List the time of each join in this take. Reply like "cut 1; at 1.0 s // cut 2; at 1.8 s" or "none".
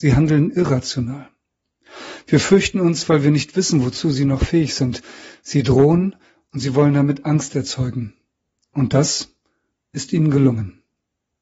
none